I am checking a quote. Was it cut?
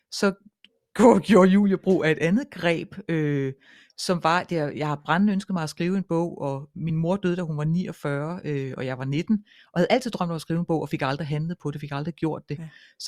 no; 0 cuts

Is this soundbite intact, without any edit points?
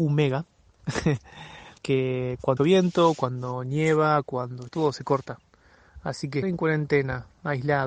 no; 4 cuts; at 1.8 s, 2.6 s, 4.7 s, 6.4 s

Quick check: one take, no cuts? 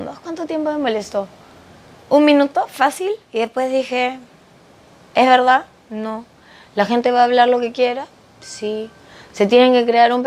no; 1 cut; at 3.2 s

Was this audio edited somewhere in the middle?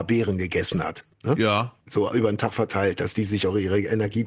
yes; 1 cut; at 1.8 s

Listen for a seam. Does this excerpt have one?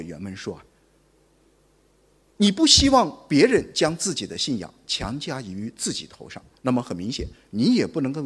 yes; 1 cut; at 6.5 s

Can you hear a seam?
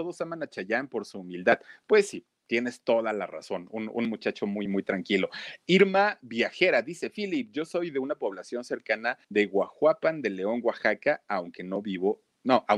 yes; 2 cuts; at 4.7 s, 9.2 s

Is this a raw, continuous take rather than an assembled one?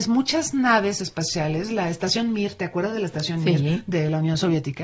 yes; 0 cuts

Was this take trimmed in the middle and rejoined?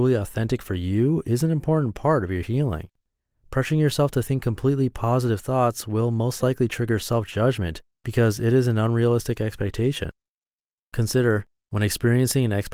no; 0 cuts

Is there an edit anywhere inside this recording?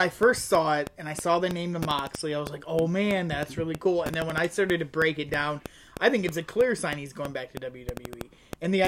no; 0 cuts

